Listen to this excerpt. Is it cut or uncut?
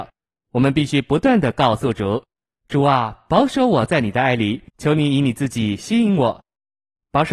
cut